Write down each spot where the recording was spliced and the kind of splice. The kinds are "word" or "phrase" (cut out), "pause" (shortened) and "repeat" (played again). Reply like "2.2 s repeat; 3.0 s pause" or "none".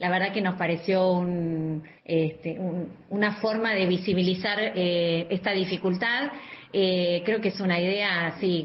2.0 s pause